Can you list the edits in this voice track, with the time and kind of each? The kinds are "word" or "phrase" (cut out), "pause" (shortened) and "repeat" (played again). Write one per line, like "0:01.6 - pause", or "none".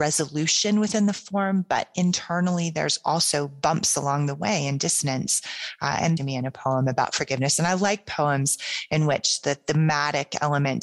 0:06.2 - phrase

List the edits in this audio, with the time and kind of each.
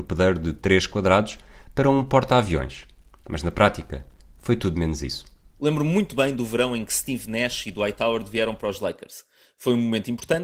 none

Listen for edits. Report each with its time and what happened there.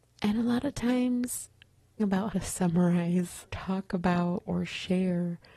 0:02.0 - word
0:02.3 - word
0:03.5 - word

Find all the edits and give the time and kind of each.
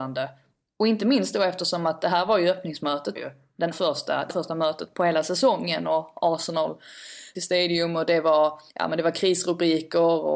0:03.2 - word
0:03.7 - word
0:04.3 - word
0:04.9 - word
0:07.4 - phrase
0:08.7 - pause

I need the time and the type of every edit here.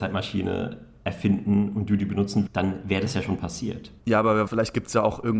0:02.5 - word
0:04.0 - pause
0:04.5 - word

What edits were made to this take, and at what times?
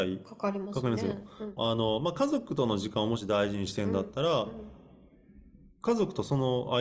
0:01.6 - phrase

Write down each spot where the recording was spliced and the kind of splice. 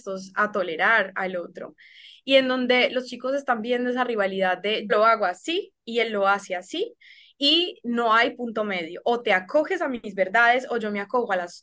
0:04.9 - word

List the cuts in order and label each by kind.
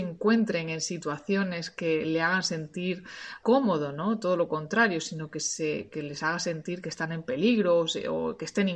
0:03.4 - word

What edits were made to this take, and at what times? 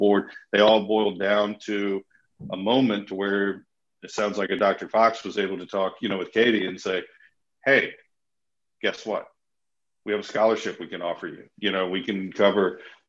none

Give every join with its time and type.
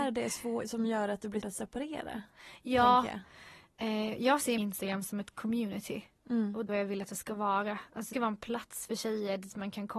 0:01.4 - word
0:04.6 - word
0:06.7 - word
0:08.1 - word

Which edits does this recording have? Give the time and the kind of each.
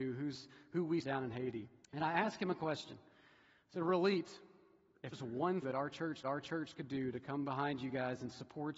0:01.0 - word
0:01.8 - pause
0:05.1 - word
0:05.6 - word
0:06.2 - repeat

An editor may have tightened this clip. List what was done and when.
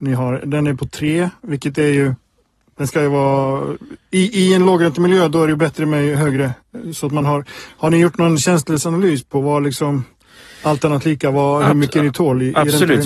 none

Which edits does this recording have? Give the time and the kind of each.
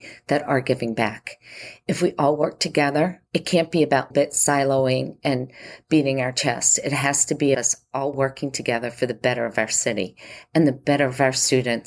0:03.3 - pause
0:04.1 - word
0:07.5 - word

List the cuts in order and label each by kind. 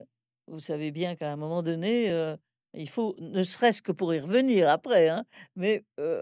none

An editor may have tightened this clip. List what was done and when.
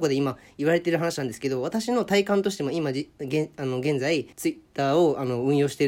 0:04.3 - pause

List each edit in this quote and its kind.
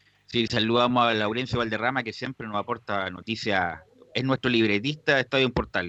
none

